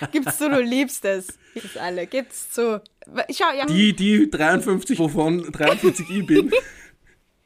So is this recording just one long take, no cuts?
no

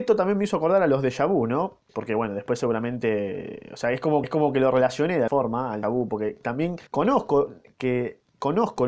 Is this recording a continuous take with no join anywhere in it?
no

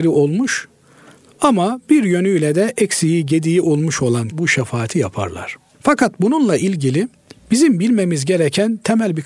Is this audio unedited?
no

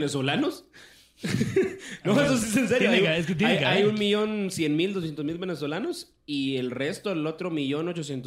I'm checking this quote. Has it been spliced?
no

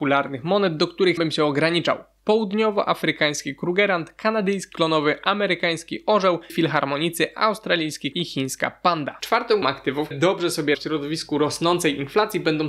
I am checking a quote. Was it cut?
yes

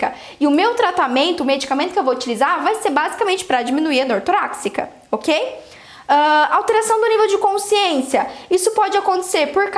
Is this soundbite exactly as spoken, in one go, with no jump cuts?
yes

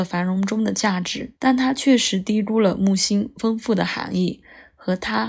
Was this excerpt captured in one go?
no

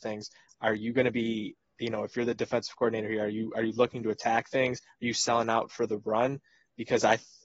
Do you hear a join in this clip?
no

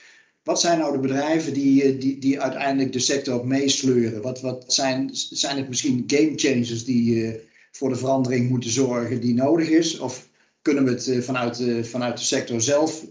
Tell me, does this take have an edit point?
yes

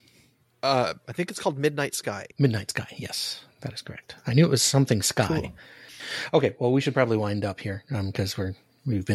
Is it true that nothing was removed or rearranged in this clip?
no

